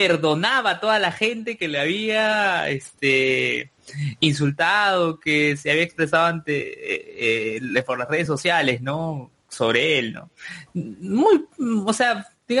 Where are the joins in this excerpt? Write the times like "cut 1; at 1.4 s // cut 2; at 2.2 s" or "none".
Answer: none